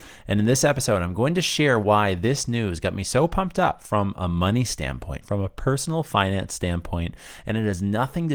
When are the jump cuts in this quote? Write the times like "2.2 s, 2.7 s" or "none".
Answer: none